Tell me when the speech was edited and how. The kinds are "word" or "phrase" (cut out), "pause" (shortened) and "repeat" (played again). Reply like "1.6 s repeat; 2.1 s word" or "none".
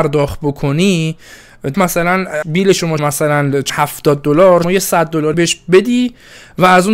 1.7 s word; 2.4 s word; 3.0 s word; 3.7 s word; 4.6 s word; 5.3 s word